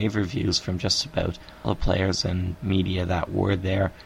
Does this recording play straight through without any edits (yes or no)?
no